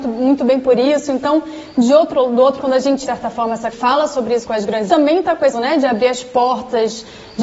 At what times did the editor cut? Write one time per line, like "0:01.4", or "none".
0:02.6
0:03.0
0:03.7
0:04.4
0:04.9
0:05.5